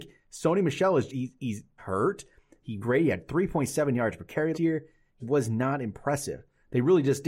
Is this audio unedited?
no; 5 cuts; at 1.1 s, 1.8 s, 2.8 s, 4.5 s, 5.2 s

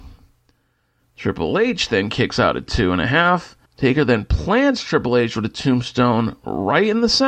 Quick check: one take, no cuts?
no; 1 cut; at 3.7 s

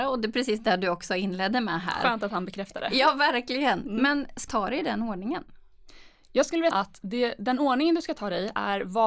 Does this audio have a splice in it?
yes; 2 cuts; at 4.5 s, 6.7 s

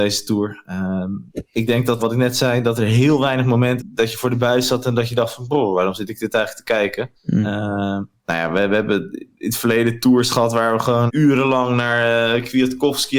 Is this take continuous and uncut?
no; 5 cuts; at 1.3 s, 2.0 s, 3.8 s, 7.2 s, 11.1 s

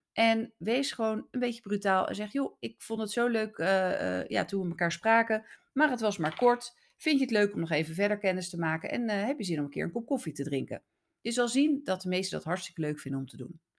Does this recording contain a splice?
no; 0 cuts

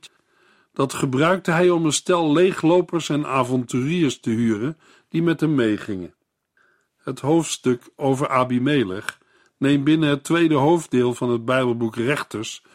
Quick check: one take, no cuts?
yes; 0 cuts

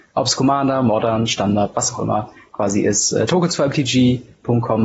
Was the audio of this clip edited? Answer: no; 0 cuts

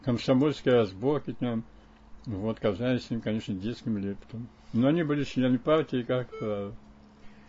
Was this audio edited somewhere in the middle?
no; 0 cuts

